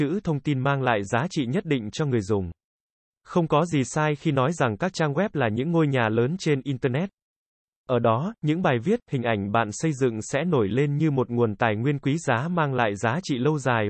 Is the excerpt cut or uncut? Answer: uncut